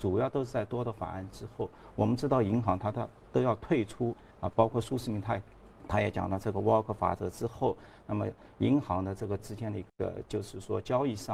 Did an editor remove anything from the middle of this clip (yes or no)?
yes